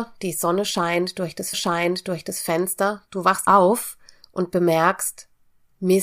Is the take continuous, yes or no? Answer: no